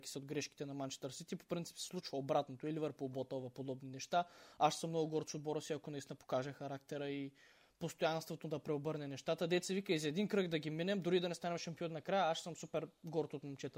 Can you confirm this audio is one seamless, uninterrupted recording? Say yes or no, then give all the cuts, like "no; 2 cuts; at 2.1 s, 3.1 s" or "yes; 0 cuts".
yes; 0 cuts